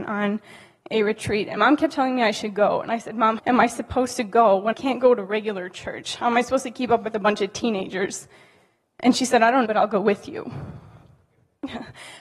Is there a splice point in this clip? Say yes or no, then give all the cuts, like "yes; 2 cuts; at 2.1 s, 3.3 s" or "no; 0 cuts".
yes; 4 cuts; at 1.6 s, 3.4 s, 4.7 s, 9.7 s